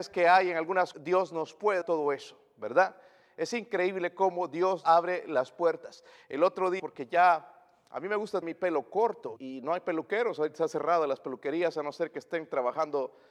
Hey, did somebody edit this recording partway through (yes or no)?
yes